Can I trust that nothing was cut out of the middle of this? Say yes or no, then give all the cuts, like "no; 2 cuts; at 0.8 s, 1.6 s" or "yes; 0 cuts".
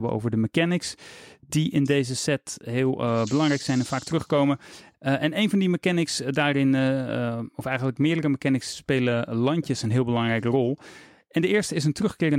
yes; 0 cuts